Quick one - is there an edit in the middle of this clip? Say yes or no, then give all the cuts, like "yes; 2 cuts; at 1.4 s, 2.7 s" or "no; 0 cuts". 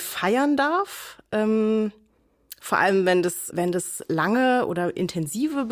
yes; 1 cut; at 3.5 s